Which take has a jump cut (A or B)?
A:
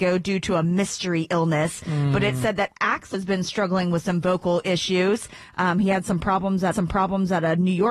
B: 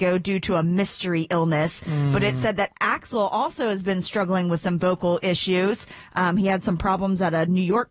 A